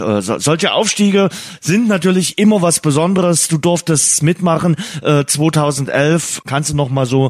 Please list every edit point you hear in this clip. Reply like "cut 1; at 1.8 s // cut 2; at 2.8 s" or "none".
none